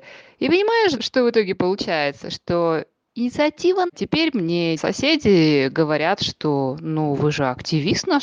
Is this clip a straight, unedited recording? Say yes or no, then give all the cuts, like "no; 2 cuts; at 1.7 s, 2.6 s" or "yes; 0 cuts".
no; 3 cuts; at 1.0 s, 3.9 s, 4.8 s